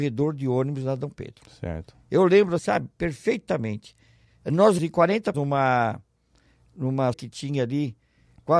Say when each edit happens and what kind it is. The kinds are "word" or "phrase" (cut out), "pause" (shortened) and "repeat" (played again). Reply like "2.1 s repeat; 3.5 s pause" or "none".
2.6 s word; 4.8 s word; 5.3 s word; 7.1 s word